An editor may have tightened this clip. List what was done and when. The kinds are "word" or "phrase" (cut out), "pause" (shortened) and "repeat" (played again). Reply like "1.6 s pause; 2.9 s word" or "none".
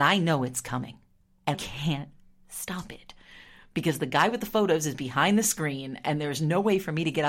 1.5 s word